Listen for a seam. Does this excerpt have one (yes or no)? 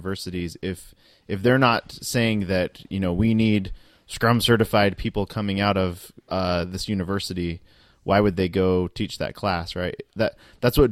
yes